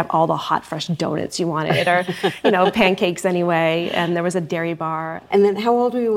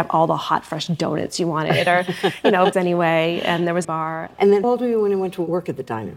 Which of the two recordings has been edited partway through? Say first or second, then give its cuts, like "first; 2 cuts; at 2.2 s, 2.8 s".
second; 3 cuts; at 2.7 s, 3.8 s, 4.6 s